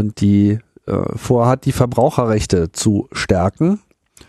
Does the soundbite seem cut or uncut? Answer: uncut